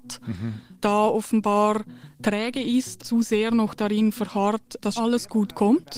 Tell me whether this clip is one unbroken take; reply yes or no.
no